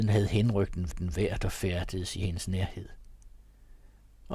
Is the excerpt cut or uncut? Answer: cut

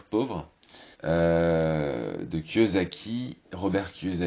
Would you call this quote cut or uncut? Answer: cut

